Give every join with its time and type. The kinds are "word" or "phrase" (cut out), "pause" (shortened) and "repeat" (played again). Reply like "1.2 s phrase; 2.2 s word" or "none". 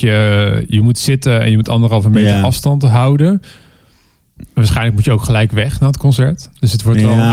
none